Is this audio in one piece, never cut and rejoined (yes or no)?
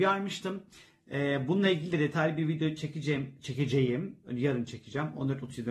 yes